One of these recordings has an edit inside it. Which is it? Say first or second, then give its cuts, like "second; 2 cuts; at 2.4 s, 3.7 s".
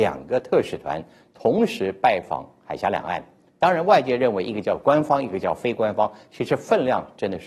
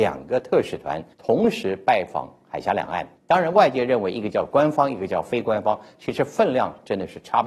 second; 2 cuts; at 1.1 s, 3.2 s